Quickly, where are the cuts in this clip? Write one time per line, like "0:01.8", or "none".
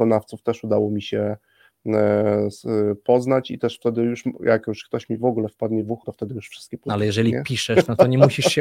0:06.0